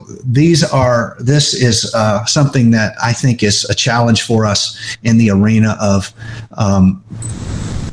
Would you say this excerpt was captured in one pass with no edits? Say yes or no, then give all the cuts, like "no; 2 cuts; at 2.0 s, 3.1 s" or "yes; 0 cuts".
yes; 0 cuts